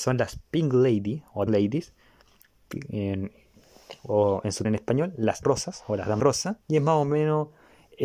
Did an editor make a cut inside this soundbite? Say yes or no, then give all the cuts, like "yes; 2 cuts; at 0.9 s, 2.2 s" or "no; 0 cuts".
yes; 6 cuts; at 1.5 s, 4.0 s, 4.6 s, 5.4 s, 6.2 s, 6.6 s